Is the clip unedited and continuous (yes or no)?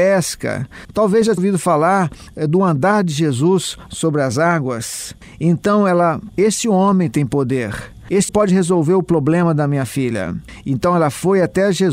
no